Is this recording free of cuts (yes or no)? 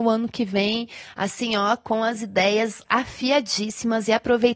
yes